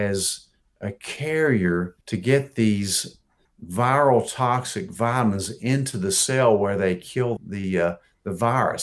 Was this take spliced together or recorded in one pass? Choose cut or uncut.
cut